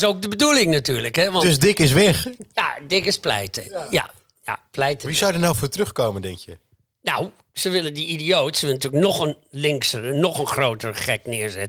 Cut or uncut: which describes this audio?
uncut